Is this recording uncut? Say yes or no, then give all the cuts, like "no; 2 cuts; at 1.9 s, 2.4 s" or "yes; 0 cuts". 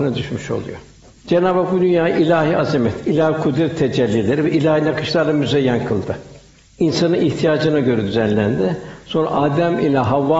yes; 0 cuts